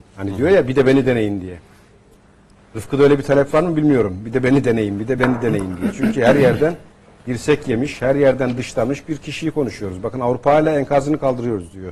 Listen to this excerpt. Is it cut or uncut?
uncut